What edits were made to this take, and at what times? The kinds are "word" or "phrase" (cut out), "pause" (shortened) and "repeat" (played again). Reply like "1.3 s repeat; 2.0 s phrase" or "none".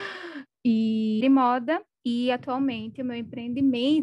1.2 s phrase; 1.9 s pause